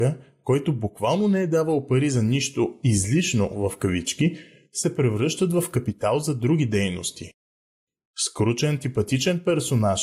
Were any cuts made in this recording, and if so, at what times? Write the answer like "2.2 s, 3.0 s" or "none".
none